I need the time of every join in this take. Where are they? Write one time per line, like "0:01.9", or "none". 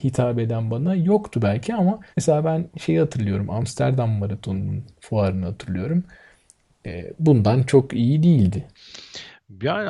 0:02.1